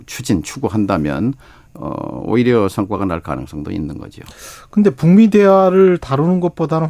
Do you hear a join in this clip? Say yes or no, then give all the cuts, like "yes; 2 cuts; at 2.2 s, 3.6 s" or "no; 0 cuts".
no; 0 cuts